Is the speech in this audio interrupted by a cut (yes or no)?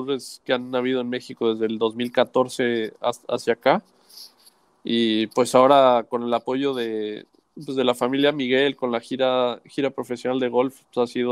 no